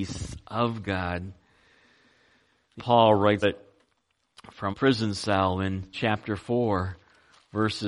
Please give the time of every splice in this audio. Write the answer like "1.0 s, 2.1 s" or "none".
2.8 s, 3.4 s, 4.7 s, 5.9 s